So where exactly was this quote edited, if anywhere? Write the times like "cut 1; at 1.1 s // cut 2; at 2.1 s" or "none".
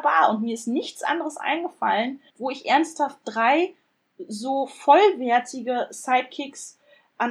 cut 1; at 2.3 s

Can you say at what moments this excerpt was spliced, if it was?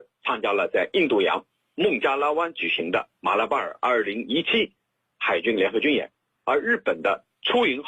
none

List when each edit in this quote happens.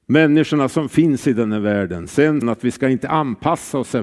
cut 1; at 2.4 s

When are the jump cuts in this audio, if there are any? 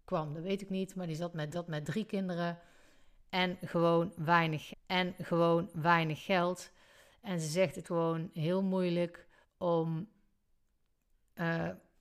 cut 1; at 1.5 s // cut 2; at 4.7 s // cut 3; at 7.8 s // cut 4; at 9.4 s

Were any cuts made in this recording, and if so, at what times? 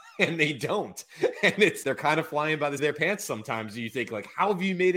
cut 1; at 1.8 s // cut 2; at 2.8 s

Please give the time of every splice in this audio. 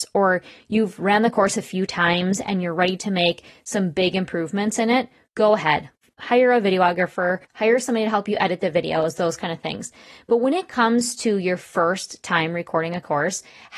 cut 1; at 7.4 s

